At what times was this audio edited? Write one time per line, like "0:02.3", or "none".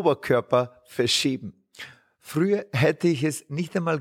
none